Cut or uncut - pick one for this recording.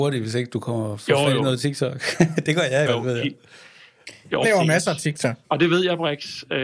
cut